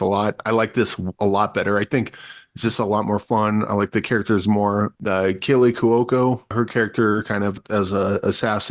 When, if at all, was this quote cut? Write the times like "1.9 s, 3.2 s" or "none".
1.1 s